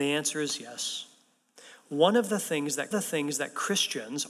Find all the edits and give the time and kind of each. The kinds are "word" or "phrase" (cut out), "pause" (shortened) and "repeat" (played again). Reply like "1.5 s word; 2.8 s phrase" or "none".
2.9 s repeat